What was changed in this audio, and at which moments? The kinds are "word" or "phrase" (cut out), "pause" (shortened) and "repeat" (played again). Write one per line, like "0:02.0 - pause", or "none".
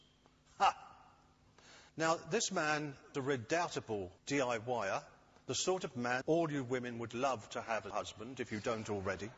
0:01.9 - pause
0:03.1 - word
0:04.2 - pause
0:06.2 - word
0:07.9 - word